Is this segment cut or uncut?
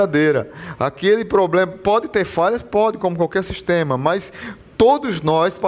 uncut